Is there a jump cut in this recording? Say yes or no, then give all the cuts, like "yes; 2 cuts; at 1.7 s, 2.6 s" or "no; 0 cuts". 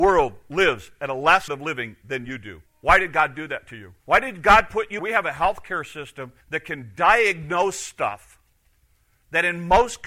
yes; 5 cuts; at 1.5 s, 2.7 s, 4.0 s, 5.0 s, 6.4 s